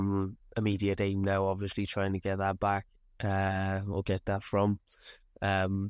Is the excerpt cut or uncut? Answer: uncut